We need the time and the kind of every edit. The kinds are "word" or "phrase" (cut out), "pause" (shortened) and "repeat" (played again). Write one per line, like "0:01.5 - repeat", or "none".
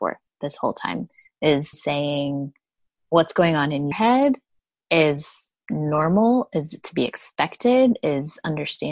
0:01.7 - word
0:03.9 - word
0:05.6 - pause